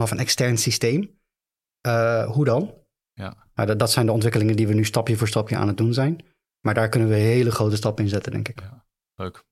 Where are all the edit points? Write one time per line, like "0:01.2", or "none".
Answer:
none